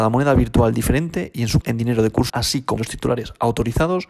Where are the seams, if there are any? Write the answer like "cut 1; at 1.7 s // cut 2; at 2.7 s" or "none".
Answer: cut 1; at 1.6 s // cut 2; at 2.3 s // cut 3; at 2.8 s